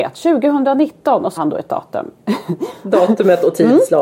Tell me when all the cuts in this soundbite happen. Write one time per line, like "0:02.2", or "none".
0:01.4

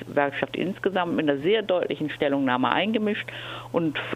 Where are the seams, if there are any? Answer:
none

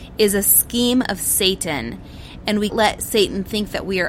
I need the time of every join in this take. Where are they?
0:02.7

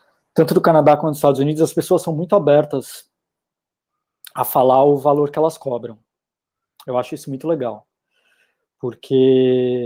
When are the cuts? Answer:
none

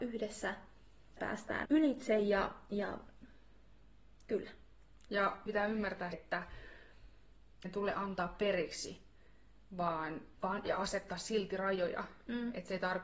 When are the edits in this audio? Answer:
0:01.2
0:01.6
0:05.5
0:06.1
0:07.6
0:10.3
0:10.6

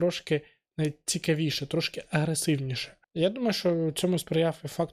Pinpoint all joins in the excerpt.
0:03.0

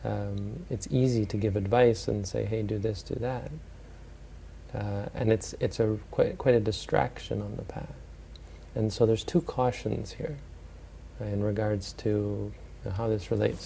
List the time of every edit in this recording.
none

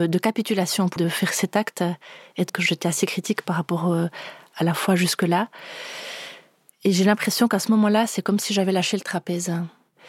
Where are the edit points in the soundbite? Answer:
0:01.0
0:02.5

